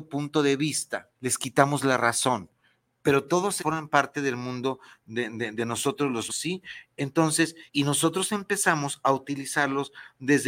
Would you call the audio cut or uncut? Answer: cut